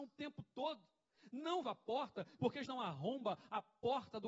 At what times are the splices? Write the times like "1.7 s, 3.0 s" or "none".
1.6 s, 2.7 s